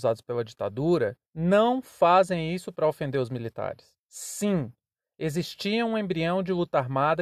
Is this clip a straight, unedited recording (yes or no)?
no